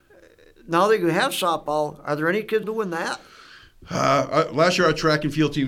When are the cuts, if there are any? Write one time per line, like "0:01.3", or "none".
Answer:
0:02.6